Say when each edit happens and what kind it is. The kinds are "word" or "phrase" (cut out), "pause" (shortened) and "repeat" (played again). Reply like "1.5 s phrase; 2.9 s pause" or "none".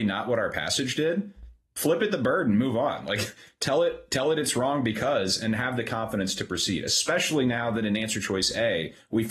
none